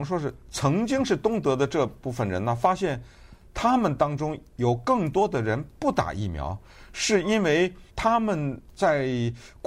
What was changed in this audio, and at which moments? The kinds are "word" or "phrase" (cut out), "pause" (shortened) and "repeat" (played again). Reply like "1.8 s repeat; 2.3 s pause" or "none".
7.9 s pause; 8.7 s pause